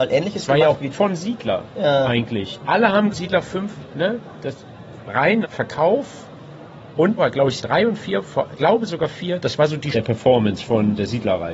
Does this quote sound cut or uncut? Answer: cut